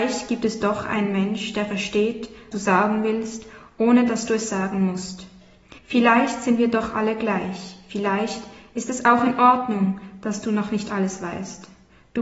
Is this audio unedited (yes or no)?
no